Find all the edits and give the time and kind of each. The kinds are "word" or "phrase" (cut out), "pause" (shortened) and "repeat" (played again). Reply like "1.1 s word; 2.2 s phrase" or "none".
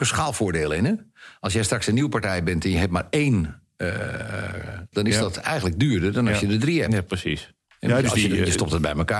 4.9 s phrase